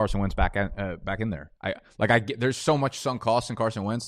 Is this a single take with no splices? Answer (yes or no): no